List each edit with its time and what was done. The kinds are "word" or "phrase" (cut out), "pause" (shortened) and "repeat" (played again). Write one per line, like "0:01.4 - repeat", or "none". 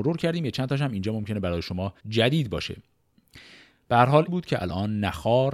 0:02.0 - pause
0:04.3 - phrase